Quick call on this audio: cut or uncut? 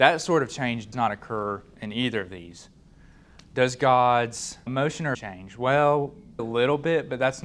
cut